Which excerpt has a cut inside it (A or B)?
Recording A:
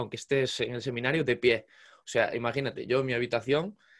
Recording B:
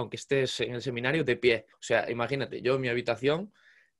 B